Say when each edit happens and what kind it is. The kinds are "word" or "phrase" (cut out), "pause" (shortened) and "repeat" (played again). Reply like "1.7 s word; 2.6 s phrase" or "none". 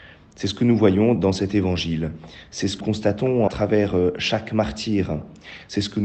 1.2 s word; 2.8 s word; 3.5 s word